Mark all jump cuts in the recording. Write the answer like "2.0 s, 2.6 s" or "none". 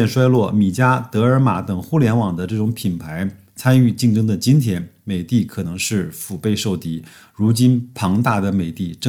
none